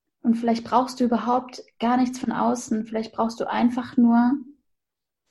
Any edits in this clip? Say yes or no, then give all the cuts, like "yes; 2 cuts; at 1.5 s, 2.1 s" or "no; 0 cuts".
no; 0 cuts